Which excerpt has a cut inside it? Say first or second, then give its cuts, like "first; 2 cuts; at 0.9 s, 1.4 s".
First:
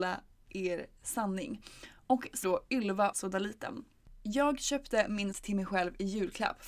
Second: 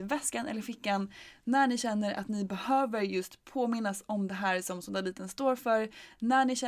first; 3 cuts; at 2.4 s, 3.1 s, 5.3 s